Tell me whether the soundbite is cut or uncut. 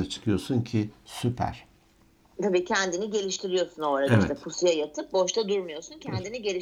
uncut